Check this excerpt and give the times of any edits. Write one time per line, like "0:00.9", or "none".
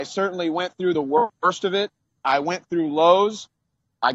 none